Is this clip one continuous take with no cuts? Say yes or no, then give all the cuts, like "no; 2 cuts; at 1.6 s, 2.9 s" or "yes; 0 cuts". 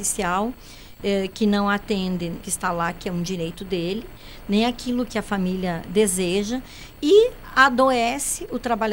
no; 1 cut; at 2.4 s